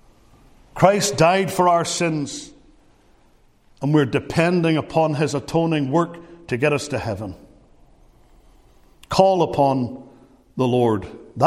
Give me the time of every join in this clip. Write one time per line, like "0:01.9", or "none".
none